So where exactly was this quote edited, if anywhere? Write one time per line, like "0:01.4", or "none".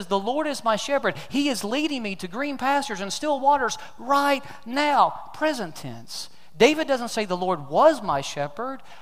none